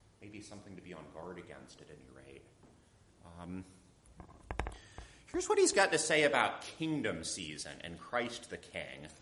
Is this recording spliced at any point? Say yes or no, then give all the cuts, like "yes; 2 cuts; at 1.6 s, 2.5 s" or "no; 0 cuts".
no; 0 cuts